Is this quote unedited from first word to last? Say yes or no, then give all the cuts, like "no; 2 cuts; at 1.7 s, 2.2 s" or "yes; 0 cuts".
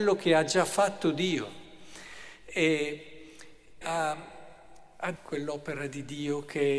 no; 2 cuts; at 3.8 s, 5.2 s